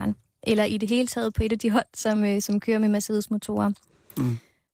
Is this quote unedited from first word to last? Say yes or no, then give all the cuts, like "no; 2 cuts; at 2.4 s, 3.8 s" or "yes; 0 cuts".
yes; 0 cuts